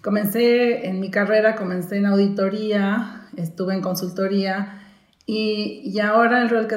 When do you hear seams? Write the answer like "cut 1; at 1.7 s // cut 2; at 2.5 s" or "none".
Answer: none